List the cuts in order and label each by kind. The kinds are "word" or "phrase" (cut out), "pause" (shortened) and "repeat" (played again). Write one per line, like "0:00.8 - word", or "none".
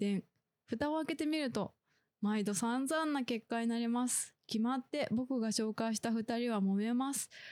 none